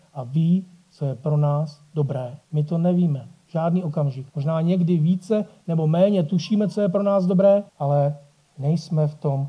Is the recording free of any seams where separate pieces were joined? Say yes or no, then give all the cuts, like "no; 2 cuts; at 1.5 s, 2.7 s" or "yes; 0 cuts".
no; 3 cuts; at 2.4 s, 4.3 s, 7.7 s